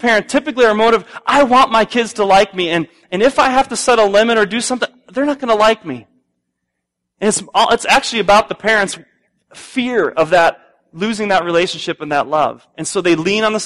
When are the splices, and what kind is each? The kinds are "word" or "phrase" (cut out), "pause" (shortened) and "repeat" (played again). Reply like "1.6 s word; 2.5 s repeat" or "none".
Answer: none